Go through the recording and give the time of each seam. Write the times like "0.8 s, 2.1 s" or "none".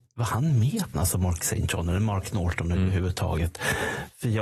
0.9 s